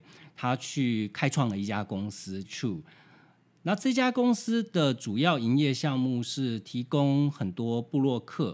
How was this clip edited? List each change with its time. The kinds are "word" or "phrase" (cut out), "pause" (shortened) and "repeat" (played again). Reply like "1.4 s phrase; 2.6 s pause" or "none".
2.4 s phrase